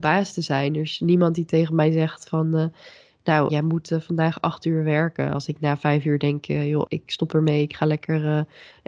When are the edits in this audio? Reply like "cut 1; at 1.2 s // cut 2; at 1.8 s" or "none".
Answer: cut 1; at 3.5 s // cut 2; at 6.9 s